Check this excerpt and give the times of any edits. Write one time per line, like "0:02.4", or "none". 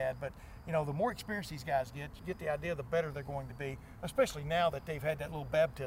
0:02.2